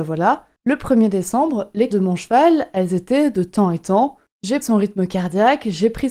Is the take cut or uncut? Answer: cut